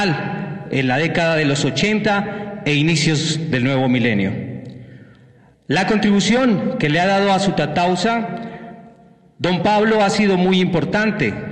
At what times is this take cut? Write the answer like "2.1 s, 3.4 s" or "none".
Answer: none